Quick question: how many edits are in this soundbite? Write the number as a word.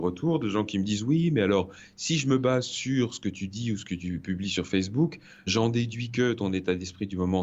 one